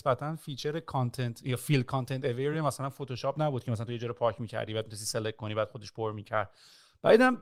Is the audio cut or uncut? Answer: uncut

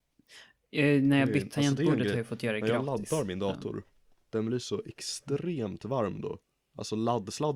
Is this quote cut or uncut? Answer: uncut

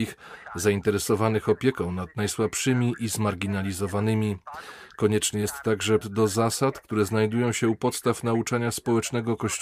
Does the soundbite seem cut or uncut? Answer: cut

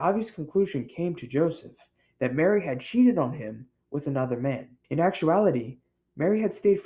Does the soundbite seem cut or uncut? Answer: cut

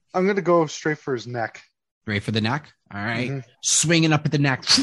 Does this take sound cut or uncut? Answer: cut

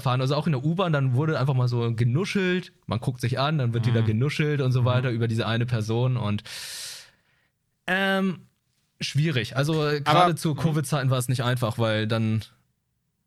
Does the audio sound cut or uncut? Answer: uncut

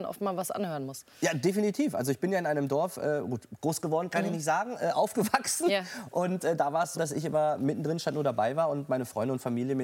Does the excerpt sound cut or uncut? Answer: cut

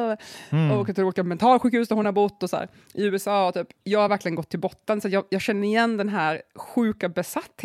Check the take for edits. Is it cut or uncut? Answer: uncut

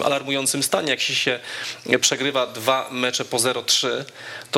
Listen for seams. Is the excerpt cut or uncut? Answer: uncut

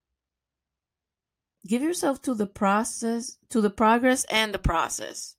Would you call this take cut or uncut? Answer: uncut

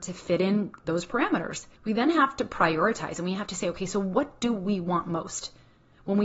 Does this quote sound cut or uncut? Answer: cut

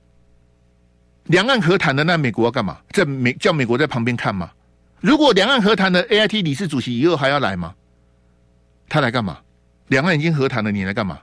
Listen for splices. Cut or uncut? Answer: cut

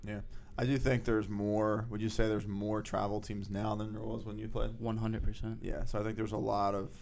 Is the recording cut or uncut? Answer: uncut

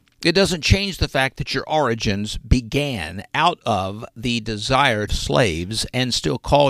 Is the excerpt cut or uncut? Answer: cut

